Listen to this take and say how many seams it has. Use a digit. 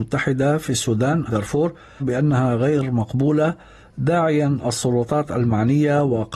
2